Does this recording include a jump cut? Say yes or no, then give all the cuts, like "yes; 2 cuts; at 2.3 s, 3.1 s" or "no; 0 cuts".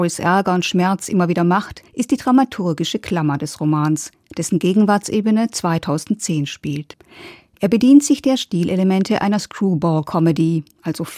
yes; 1 cut; at 1.9 s